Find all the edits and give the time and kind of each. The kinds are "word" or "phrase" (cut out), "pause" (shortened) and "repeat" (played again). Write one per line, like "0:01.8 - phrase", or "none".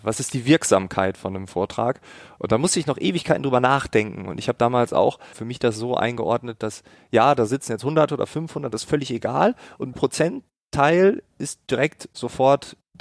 0:05.3 - word
0:08.1 - word
0:09.9 - word

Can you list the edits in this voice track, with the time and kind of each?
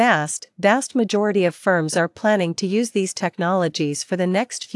none

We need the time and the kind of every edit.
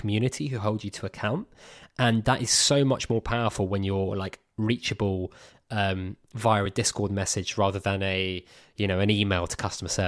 none

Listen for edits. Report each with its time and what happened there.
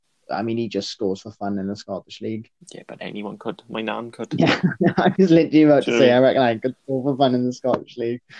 none

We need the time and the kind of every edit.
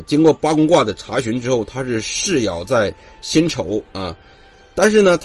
0:03.9 - pause

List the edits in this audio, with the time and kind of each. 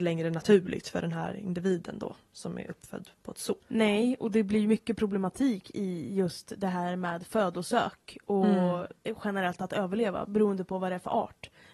0:03.6 - pause
0:09.0 - pause

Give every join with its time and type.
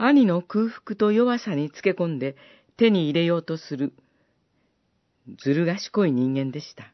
none

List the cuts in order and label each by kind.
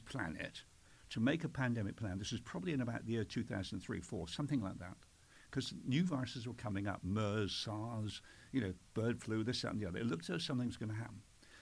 none

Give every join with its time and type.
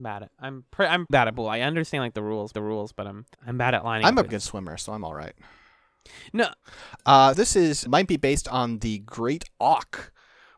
0:01.1 - word
0:02.5 - repeat
0:03.3 - pause
0:04.3 - word
0:07.3 - word
0:07.9 - word

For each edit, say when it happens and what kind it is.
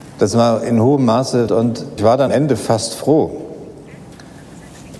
0:01.5 - word
0:02.0 - word
0:02.3 - word

